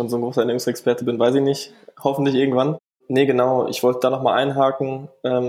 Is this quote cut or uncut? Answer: uncut